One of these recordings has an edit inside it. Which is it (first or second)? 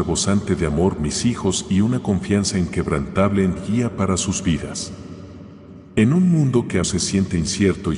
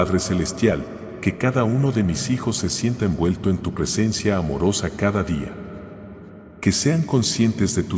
first